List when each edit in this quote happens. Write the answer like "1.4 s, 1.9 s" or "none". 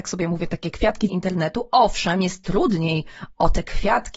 1.1 s

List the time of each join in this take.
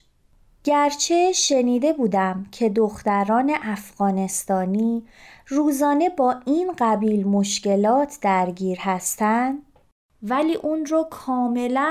none

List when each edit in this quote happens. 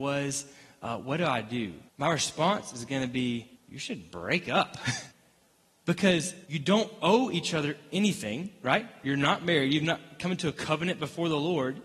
1.9 s, 3.6 s, 5.1 s, 6.4 s

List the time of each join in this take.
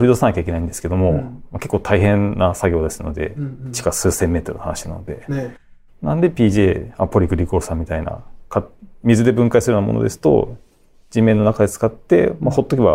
none

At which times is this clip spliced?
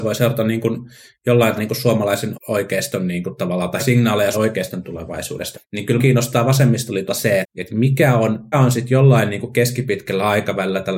1.6 s, 2.3 s, 3.8 s, 4.3 s, 5.5 s, 6.0 s, 7.1 s, 7.4 s, 8.5 s

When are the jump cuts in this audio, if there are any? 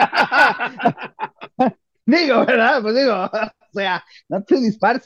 none

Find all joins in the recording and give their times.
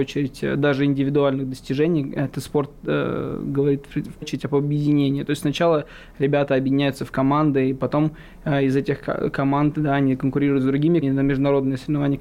4.2 s, 11.0 s

